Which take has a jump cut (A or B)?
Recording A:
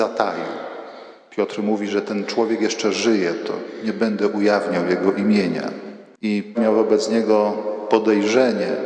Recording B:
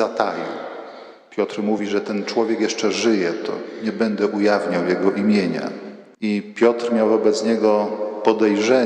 A